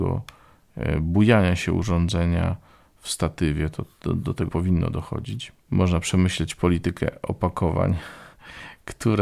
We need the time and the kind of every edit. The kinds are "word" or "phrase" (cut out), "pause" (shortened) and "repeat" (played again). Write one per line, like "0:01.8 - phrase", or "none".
0:04.5 - word